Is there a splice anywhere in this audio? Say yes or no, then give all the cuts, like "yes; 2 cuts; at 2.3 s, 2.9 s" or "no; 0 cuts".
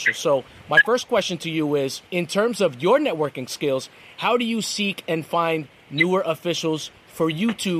yes; 1 cut; at 2.1 s